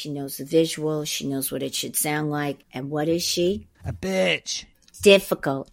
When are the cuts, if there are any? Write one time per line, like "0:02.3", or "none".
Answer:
0:02.6
0:03.7
0:04.7